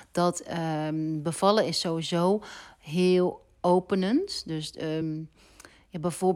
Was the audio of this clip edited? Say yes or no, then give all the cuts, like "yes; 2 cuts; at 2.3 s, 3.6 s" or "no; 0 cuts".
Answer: no; 0 cuts